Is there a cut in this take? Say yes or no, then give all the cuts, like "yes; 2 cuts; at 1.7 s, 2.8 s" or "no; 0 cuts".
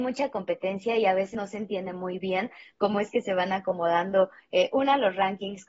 no; 0 cuts